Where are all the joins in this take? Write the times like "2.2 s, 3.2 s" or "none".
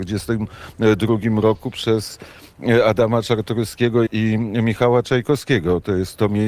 4.1 s